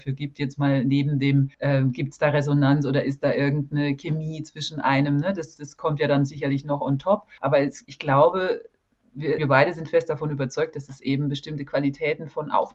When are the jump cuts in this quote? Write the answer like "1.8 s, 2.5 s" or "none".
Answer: 1.5 s, 7.4 s, 9.4 s